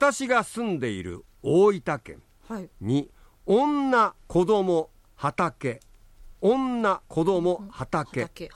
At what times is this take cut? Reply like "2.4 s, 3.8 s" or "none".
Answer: 2.7 s, 4.2 s, 6.4 s, 7.1 s